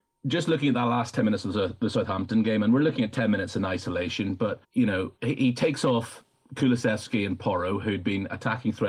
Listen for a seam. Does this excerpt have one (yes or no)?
yes